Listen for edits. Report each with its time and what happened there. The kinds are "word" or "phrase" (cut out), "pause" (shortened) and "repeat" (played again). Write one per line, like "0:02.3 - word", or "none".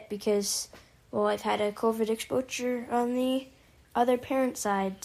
none